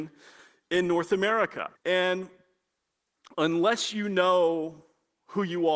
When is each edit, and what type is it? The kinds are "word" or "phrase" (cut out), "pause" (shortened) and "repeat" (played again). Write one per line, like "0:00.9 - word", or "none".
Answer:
0:01.8 - pause